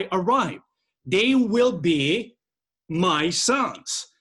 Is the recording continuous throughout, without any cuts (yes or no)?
yes